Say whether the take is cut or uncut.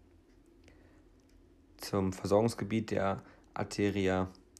uncut